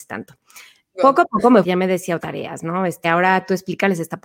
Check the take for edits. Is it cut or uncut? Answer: cut